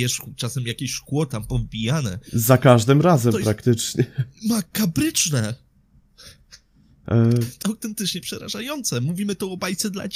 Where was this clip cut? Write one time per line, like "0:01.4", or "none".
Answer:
0:07.6